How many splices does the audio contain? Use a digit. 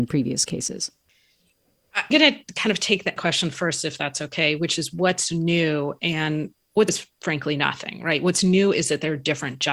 3